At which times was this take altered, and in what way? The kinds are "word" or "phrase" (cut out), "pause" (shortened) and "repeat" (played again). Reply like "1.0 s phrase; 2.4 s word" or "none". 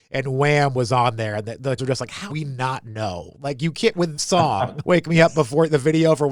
1.8 s word; 2.3 s word; 4.2 s word; 4.8 s word